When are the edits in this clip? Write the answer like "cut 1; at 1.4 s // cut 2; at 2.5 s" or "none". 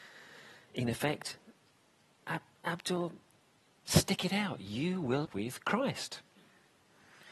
cut 1; at 5.2 s